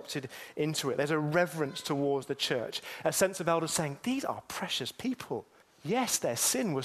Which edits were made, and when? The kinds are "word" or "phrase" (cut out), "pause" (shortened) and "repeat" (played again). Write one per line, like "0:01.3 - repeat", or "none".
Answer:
0:05.6 - pause